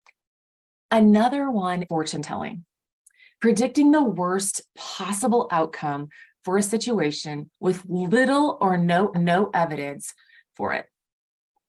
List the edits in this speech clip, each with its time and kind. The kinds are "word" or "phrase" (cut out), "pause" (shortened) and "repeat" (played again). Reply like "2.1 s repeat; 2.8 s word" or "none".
1.8 s word; 4.7 s pause; 9.1 s repeat